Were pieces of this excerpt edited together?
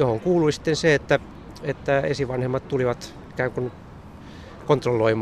no; 0 cuts

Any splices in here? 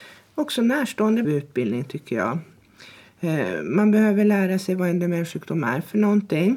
yes; 1 cut; at 1.2 s

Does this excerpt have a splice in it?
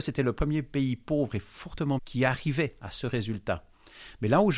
yes; 1 cut; at 2.0 s

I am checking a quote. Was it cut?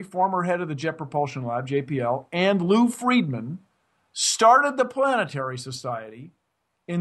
no; 0 cuts

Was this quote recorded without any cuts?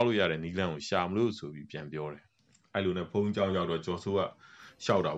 yes; 0 cuts

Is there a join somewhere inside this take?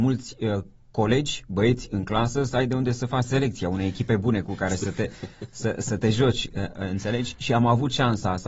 no; 0 cuts

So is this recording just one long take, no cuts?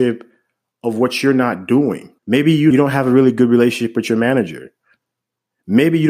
no; 2 cuts; at 2.2 s, 2.7 s

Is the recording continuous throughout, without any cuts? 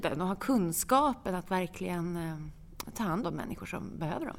no; 1 cut; at 3.2 s

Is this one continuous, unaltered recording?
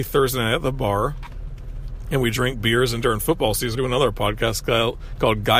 no; 1 cut; at 3.8 s

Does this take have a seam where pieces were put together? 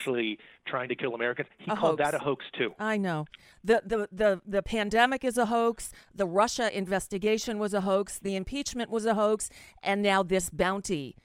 no; 0 cuts

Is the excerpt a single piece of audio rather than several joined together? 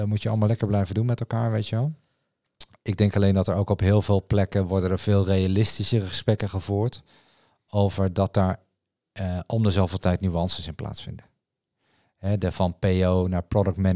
yes; 0 cuts

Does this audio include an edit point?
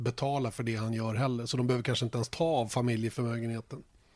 no; 0 cuts

